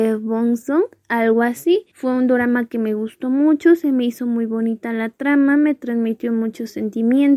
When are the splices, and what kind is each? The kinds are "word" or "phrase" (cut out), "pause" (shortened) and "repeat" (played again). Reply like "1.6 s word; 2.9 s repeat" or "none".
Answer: 1.9 s pause